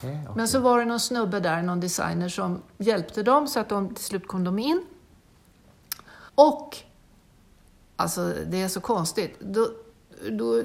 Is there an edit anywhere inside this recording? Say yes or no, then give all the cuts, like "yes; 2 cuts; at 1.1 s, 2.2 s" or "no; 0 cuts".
yes; 1 cut; at 6.3 s